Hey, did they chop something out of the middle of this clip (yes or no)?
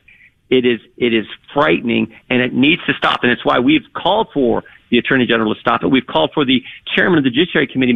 no